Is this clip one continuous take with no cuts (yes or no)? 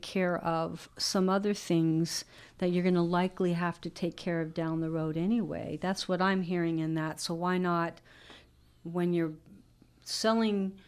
yes